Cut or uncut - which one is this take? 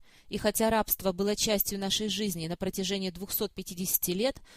uncut